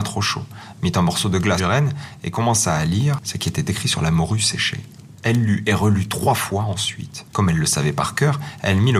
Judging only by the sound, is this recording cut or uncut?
cut